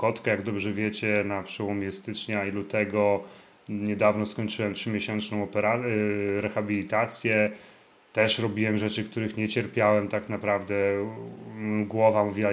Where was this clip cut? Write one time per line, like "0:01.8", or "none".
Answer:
none